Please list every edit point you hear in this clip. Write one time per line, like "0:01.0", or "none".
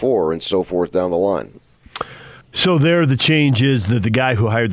0:02.4